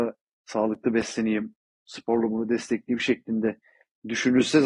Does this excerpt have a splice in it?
no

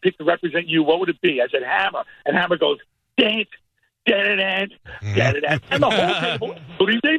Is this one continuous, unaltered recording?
yes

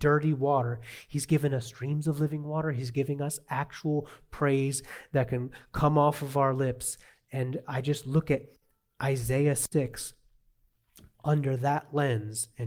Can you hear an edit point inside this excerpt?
no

